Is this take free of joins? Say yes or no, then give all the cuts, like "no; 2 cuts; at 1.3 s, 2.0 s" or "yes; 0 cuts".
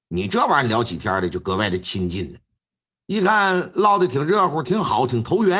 no; 1 cut; at 2.6 s